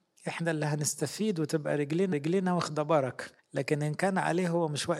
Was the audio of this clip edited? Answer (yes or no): yes